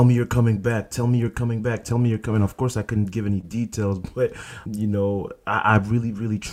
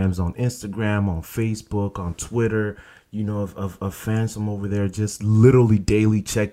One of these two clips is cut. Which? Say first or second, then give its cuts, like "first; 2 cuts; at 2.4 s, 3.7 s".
first; 1 cut; at 4.7 s